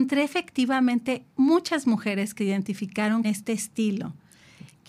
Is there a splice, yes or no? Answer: yes